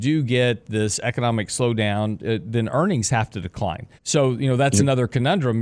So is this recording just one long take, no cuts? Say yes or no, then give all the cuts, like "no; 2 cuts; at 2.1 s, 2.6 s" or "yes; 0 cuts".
no; 1 cut; at 4.0 s